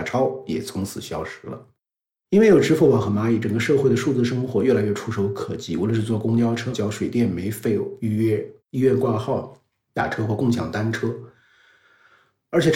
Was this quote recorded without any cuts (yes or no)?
no